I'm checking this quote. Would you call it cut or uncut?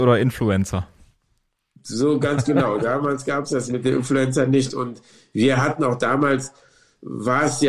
uncut